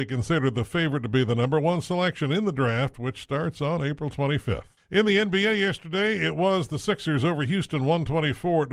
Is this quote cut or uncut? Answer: uncut